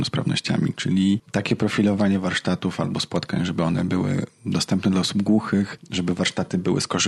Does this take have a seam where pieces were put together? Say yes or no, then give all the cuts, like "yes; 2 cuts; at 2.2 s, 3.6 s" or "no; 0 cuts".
no; 0 cuts